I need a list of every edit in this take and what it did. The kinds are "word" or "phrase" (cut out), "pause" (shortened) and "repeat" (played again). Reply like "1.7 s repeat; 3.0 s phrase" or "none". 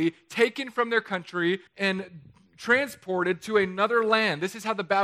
1.7 s pause

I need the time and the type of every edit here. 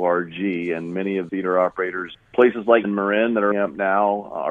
1.3 s word; 2.1 s word; 2.8 s word; 3.5 s word

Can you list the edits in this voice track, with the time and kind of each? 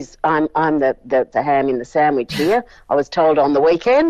1.3 s word

